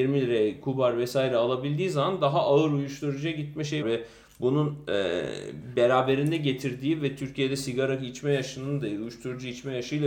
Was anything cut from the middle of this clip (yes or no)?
yes